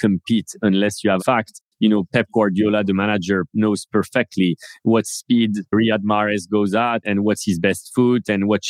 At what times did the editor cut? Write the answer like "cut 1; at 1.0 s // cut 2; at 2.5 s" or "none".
cut 1; at 1.2 s // cut 2; at 7.0 s